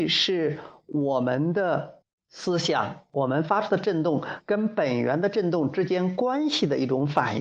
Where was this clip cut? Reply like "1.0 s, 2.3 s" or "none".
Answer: 2.0 s